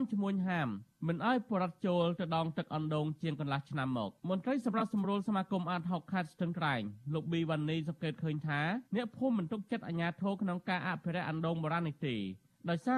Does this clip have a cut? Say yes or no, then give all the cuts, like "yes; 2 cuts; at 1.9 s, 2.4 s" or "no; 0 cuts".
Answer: yes; 2 cuts; at 4.2 s, 8.9 s